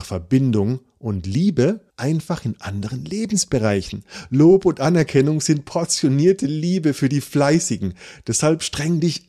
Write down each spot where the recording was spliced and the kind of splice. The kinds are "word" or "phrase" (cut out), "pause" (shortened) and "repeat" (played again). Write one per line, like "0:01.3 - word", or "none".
0:01.9 - pause